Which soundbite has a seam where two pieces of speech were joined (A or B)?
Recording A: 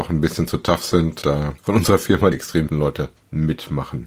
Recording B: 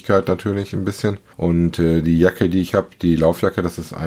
A